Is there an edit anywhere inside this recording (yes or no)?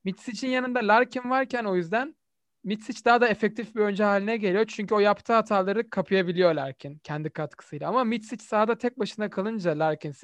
no